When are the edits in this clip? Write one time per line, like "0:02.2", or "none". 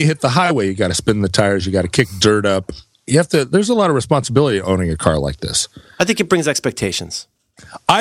none